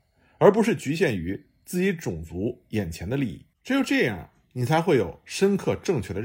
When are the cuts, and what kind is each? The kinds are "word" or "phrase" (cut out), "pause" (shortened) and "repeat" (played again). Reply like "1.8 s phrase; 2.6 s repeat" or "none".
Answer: 3.5 s pause